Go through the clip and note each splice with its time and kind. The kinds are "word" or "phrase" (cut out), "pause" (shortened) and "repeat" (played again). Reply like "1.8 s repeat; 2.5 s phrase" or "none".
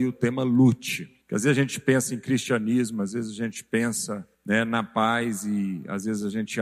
1.2 s pause; 4.3 s pause